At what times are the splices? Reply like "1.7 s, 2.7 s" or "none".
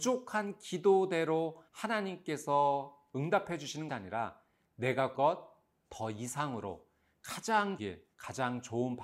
1.7 s, 3.9 s, 5.1 s, 7.8 s, 8.1 s